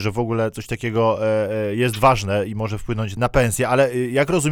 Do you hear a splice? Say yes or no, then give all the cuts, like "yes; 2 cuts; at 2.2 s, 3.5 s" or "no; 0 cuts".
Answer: yes; 1 cut; at 3.2 s